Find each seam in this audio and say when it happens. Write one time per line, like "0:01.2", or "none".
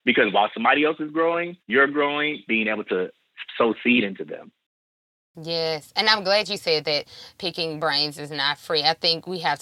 0:01.6
0:02.5
0:07.4